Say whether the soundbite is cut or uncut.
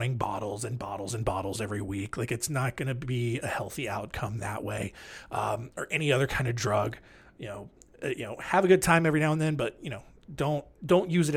uncut